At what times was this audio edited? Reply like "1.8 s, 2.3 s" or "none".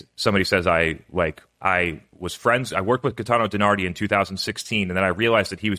none